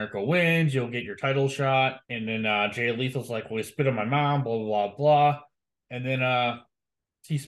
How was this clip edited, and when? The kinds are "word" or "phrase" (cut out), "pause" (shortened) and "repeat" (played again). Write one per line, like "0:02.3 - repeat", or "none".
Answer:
0:02.0 - pause

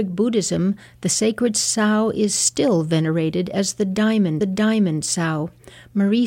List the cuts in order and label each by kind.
0:04.4 - repeat

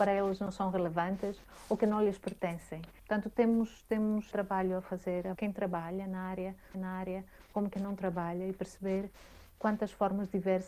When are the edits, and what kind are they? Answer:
0:03.0 - pause
0:04.3 - word
0:05.3 - phrase
0:06.7 - repeat

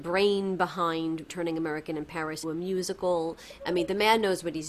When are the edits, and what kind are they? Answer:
0:01.3 - word
0:02.4 - word

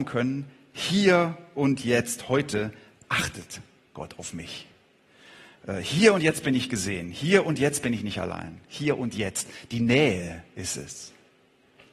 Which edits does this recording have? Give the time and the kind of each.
none

